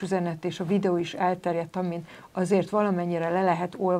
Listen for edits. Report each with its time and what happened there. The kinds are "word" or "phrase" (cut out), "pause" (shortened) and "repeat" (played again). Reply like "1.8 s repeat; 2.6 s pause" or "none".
none